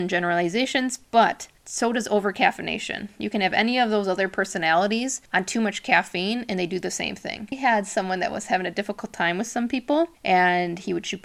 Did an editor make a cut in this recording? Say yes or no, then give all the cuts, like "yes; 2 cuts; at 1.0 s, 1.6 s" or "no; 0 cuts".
yes; 3 cuts; at 1.6 s, 5.2 s, 10.1 s